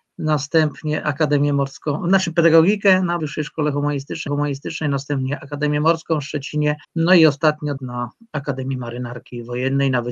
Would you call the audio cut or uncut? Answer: cut